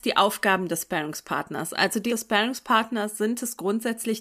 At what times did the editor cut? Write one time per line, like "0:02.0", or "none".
0:02.1